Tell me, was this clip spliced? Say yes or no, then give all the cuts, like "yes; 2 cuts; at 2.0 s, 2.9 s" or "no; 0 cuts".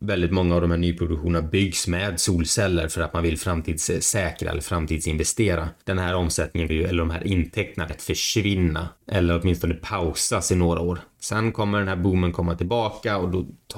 yes; 4 cuts; at 5.8 s, 6.7 s, 7.9 s, 9.0 s